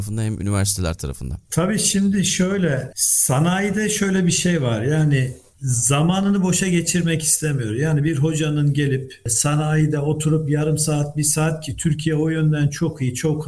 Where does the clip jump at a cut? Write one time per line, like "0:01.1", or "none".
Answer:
none